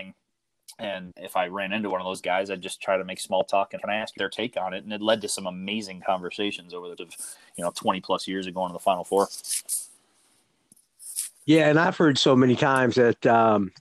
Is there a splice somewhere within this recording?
yes; 5 cuts; at 1.1 s, 3.8 s, 4.2 s, 7.0 s, 12.2 s

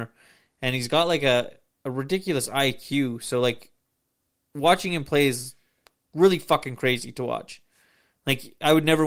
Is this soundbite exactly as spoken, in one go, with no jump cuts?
yes; 0 cuts

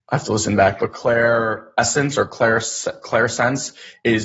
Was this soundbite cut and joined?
no; 0 cuts

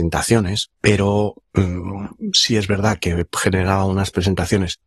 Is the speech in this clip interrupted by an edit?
no; 0 cuts

